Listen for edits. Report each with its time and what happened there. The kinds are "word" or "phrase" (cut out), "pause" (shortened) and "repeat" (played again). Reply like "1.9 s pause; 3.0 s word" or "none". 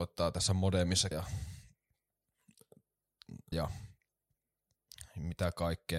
1.1 s word; 3.5 s word